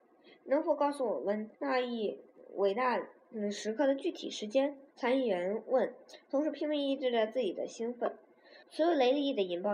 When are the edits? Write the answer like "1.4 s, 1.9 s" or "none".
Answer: 1.5 s, 4.9 s, 8.6 s